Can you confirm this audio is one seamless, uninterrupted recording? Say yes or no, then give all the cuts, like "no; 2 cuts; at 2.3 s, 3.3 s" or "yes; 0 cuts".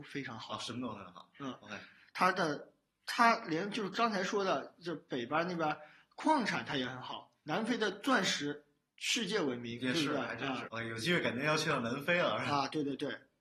no; 1 cut; at 10.7 s